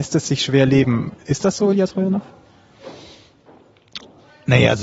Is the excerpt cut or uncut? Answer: uncut